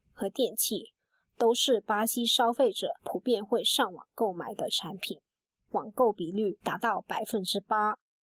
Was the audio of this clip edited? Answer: no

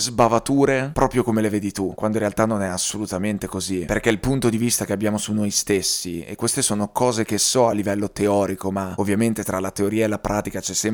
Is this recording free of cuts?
yes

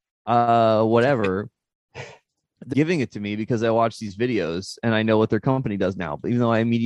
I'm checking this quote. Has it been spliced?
yes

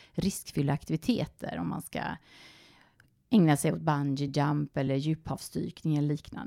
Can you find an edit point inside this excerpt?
no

